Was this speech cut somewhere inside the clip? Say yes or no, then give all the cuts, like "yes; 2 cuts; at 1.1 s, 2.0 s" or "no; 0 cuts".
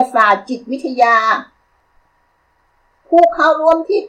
no; 0 cuts